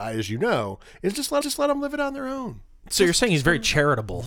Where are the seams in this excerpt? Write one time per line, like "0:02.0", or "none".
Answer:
0:01.4